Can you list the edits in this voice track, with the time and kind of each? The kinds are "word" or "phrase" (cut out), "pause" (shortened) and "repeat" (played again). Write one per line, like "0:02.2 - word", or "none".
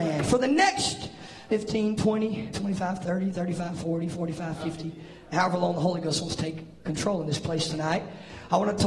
0:01.5 - word
0:02.5 - word
0:05.3 - word